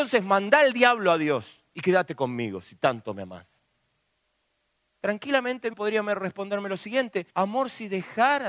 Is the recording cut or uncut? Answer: cut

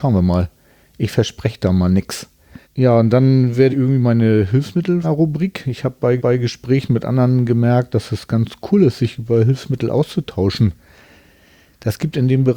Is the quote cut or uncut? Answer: cut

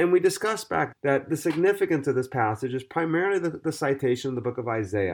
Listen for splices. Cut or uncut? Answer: cut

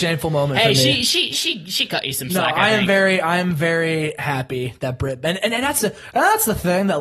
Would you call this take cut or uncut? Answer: uncut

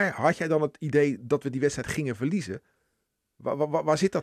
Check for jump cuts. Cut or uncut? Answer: uncut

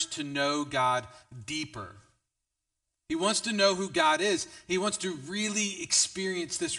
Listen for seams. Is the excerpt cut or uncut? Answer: uncut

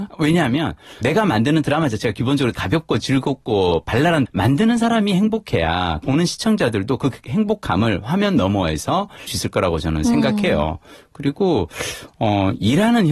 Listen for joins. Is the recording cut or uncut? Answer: cut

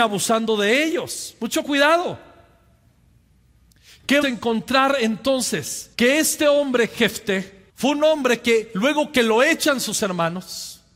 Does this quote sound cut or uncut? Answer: cut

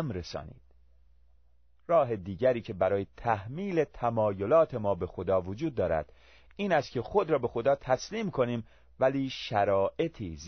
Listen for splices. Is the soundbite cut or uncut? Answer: uncut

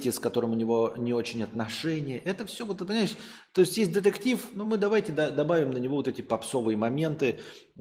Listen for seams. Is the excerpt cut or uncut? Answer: uncut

